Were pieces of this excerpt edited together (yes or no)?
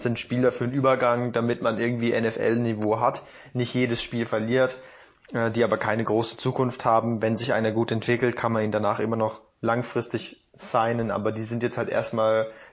no